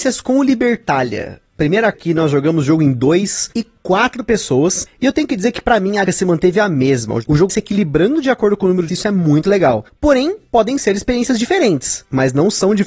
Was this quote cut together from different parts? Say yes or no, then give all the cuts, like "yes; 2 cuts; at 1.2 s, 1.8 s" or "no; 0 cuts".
yes; 5 cuts; at 1.9 s, 3.5 s, 6.1 s, 7.5 s, 8.9 s